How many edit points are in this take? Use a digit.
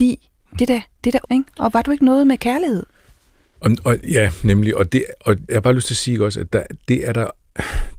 2